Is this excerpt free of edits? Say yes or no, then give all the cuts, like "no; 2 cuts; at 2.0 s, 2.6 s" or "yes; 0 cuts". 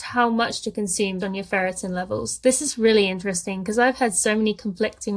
no; 1 cut; at 1.2 s